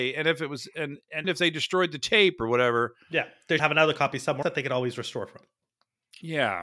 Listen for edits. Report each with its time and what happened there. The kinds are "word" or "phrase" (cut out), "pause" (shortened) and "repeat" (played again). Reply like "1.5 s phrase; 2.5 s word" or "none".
1.2 s word; 3.6 s word; 4.4 s word